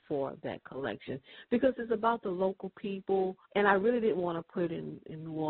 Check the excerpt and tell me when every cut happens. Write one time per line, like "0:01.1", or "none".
0:03.4